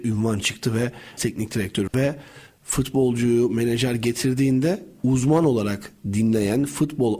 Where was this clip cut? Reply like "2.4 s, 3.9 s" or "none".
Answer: 1.2 s, 1.9 s